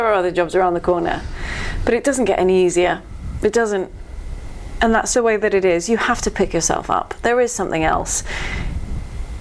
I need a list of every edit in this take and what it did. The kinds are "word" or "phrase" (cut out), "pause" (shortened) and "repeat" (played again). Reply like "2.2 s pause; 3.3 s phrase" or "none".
5.1 s word